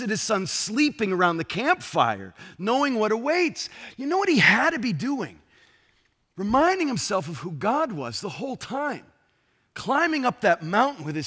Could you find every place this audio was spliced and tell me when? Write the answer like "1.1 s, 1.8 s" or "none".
none